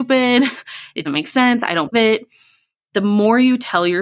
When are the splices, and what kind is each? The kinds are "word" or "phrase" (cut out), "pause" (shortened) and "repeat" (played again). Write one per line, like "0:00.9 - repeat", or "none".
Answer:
0:01.0 - word
0:01.9 - word